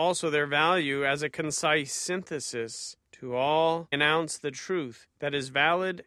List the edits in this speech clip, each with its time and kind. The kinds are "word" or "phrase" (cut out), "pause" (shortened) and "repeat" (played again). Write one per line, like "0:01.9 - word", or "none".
0:03.9 - word